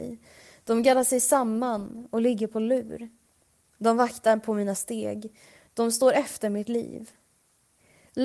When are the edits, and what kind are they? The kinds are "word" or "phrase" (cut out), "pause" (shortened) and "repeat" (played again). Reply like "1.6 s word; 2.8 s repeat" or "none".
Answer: none